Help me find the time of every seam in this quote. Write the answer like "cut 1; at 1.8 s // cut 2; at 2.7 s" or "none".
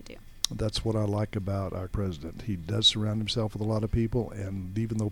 cut 1; at 1.9 s